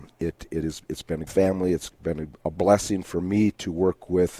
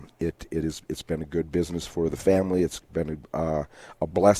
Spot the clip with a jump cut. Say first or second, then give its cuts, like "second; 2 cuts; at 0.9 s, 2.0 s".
first; 2 cuts; at 1.3 s, 2.4 s